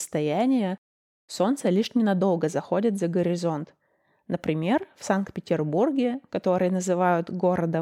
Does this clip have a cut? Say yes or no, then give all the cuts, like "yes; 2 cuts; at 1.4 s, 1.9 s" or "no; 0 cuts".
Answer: no; 0 cuts